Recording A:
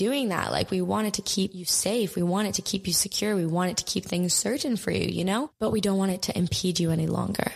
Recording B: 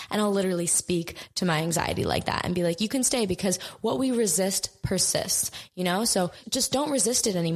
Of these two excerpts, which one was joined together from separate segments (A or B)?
B